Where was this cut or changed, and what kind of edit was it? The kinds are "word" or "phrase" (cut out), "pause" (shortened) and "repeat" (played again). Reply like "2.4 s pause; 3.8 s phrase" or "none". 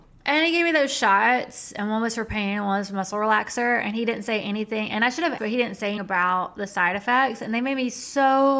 5.4 s word; 6.0 s word

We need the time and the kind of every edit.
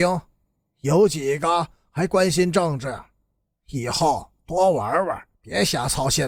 4.4 s pause; 5.3 s pause

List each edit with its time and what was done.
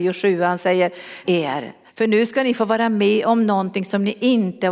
1.2 s word; 1.9 s pause

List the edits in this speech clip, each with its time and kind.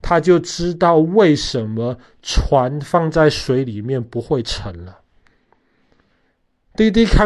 none

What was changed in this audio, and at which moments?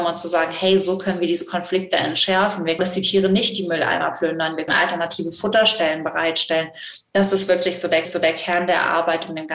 2.8 s phrase; 4.7 s word; 8.0 s repeat

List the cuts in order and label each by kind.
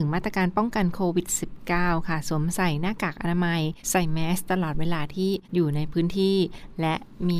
3.8 s pause; 5.4 s pause

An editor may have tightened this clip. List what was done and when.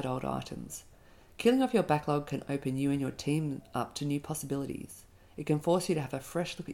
none

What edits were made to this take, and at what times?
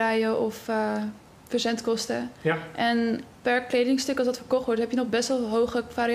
none

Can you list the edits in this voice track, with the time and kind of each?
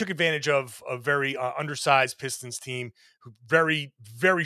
none

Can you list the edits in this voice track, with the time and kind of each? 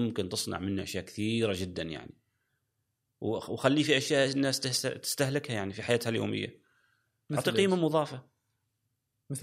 none

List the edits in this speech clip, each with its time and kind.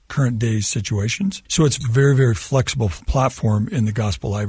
1.5 s pause

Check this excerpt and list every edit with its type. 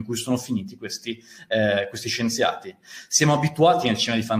none

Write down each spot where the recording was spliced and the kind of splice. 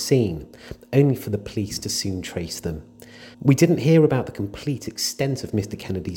3.3 s pause

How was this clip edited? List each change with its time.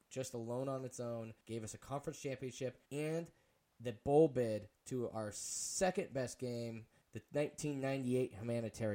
1.4 s pause; 2.9 s pause; 7.0 s pause

